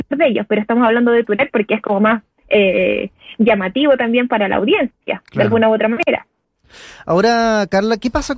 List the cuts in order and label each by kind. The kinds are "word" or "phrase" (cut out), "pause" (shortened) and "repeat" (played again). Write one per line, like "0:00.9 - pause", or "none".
none